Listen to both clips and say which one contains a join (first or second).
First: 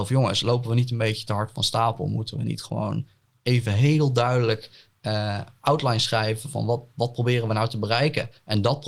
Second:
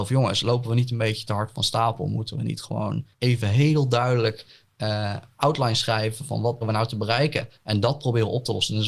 second